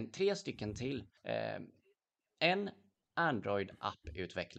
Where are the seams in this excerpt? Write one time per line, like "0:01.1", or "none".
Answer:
0:01.2